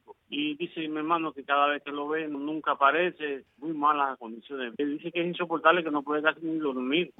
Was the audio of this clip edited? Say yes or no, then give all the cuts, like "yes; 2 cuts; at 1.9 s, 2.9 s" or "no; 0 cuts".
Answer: no; 0 cuts